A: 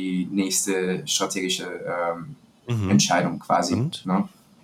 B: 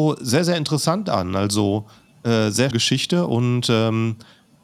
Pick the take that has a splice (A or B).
B